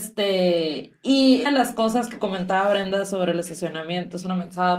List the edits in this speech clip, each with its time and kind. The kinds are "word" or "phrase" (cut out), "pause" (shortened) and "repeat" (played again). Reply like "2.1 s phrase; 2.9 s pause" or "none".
1.5 s word